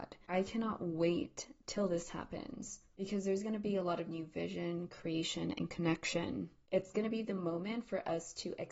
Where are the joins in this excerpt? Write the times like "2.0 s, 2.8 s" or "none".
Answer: none